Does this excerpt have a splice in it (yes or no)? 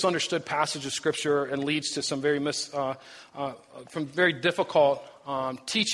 no